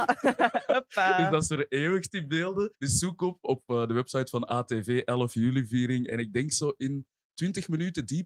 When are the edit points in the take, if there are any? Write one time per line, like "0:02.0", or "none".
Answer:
0:02.7